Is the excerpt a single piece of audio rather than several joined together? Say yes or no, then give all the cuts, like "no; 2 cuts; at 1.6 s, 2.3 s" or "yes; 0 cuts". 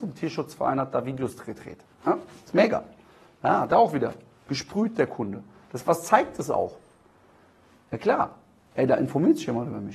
yes; 0 cuts